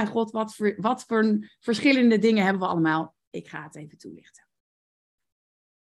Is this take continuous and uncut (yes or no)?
yes